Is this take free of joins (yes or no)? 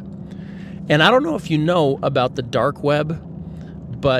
yes